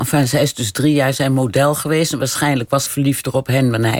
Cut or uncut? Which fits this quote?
cut